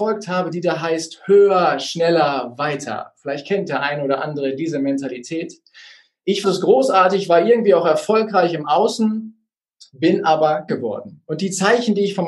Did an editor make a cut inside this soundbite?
yes; 2 cuts; at 6.4 s, 10.7 s

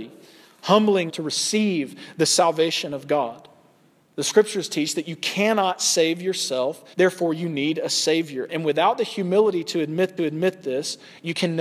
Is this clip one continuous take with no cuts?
no; 3 cuts; at 1.1 s, 6.9 s, 10.2 s

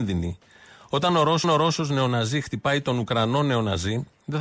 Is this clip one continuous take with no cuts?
no; 1 cut; at 1.4 s

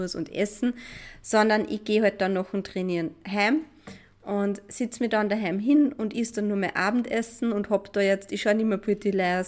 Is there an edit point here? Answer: no; 0 cuts

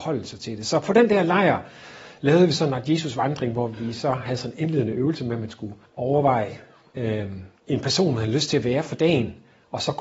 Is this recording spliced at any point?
yes; 2 cuts; at 5.8 s, 7.6 s

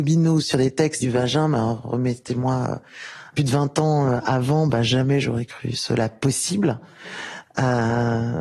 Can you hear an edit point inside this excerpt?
yes; 2 cuts; at 1.0 s, 3.4 s

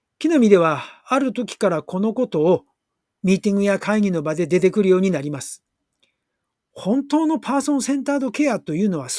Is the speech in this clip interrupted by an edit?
no; 0 cuts

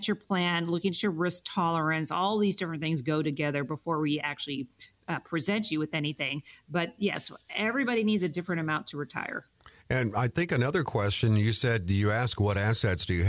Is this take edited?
no; 0 cuts

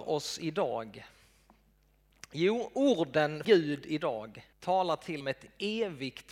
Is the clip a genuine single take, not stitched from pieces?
no; 3 cuts; at 3.4 s, 4.5 s, 5.2 s

